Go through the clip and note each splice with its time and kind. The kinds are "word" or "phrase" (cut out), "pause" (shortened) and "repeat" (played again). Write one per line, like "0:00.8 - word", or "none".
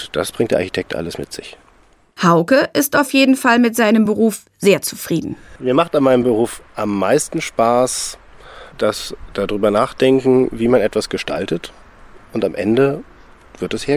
none